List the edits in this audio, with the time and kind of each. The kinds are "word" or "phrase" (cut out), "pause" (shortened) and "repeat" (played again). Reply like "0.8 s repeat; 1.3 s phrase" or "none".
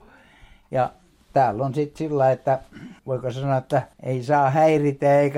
3.0 s pause; 3.9 s pause